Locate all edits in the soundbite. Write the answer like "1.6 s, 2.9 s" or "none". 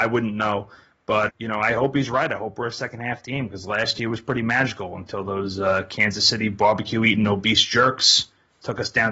1.3 s